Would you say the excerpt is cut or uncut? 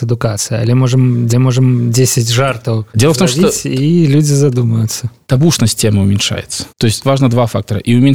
cut